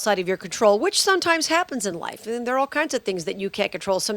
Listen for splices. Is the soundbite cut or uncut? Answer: uncut